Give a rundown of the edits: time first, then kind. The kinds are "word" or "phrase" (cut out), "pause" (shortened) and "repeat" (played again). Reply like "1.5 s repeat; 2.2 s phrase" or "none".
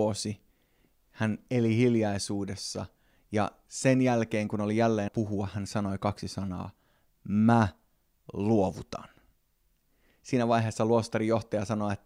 5.1 s word